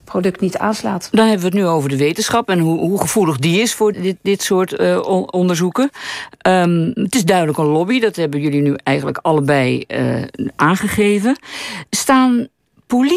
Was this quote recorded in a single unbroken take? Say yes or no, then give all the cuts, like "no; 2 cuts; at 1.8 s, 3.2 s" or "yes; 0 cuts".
no; 1 cut; at 3.9 s